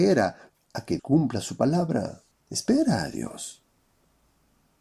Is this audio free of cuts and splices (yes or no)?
no